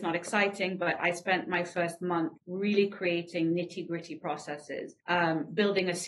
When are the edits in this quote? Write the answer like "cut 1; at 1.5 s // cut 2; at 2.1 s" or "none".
cut 1; at 2.4 s // cut 2; at 5.0 s